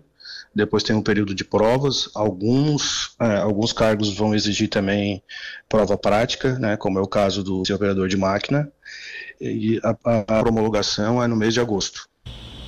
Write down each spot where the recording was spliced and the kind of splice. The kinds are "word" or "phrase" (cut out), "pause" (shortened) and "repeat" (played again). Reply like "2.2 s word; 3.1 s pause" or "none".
7.6 s word; 9.4 s word; 10.4 s phrase